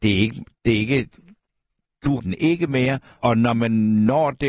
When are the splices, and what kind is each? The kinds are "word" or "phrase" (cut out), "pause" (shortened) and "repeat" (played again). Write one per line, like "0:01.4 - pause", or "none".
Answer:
0:02.2 - word
0:03.2 - word